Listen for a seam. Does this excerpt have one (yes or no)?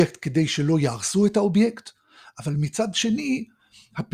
no